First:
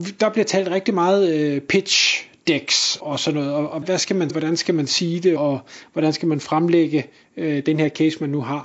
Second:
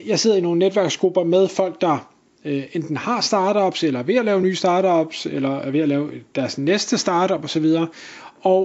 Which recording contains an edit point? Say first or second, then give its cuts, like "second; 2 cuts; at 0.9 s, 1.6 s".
first; 4 cuts; at 3.0 s, 3.8 s, 4.3 s, 5.4 s